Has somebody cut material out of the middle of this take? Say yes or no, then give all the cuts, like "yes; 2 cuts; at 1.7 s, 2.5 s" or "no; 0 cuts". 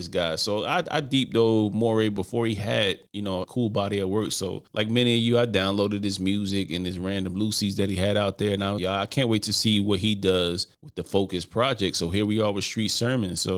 yes; 5 cuts; at 3.1 s, 3.4 s, 4.7 s, 8.8 s, 10.7 s